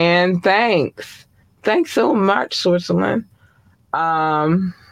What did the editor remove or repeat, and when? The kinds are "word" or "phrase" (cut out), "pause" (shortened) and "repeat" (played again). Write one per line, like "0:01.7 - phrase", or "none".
0:01.4 - pause